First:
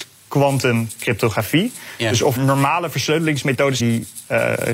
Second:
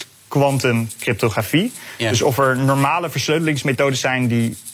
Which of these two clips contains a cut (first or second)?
first